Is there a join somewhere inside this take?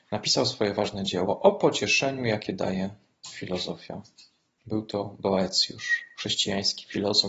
no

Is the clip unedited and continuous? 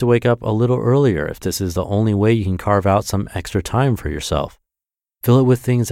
yes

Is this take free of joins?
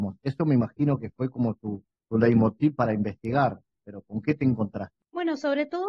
yes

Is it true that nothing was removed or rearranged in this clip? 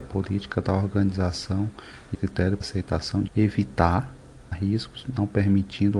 no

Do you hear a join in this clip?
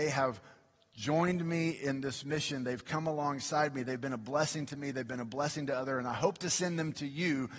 no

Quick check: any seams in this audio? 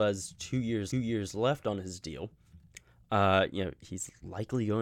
yes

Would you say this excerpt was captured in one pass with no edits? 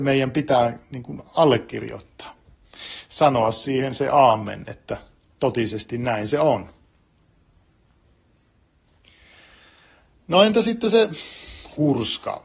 yes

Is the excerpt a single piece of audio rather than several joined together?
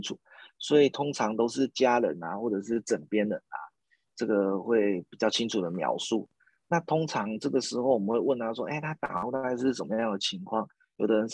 yes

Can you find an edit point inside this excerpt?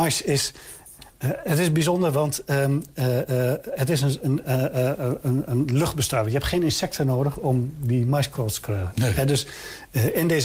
no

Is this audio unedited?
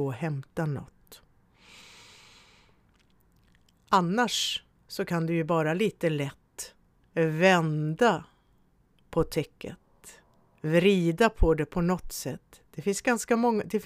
yes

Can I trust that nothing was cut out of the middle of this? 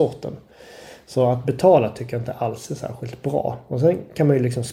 yes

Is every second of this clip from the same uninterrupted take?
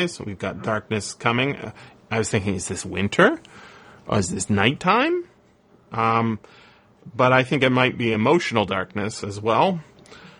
yes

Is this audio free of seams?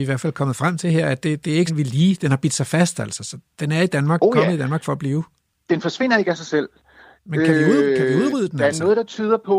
no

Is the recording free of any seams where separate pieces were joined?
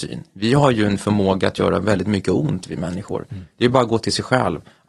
yes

